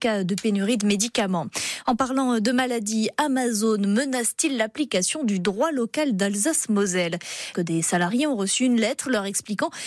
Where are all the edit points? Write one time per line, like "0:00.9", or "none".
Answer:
0:07.5